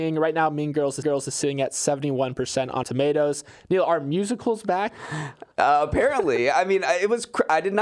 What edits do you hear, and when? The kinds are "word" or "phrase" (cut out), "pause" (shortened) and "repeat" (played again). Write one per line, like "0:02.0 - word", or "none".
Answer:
0:01.0 - repeat
0:02.8 - word
0:05.5 - pause